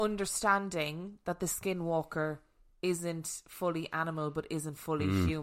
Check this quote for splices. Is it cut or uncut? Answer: uncut